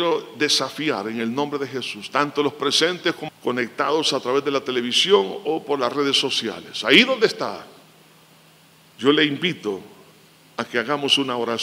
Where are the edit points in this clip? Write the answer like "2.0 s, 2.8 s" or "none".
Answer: 3.3 s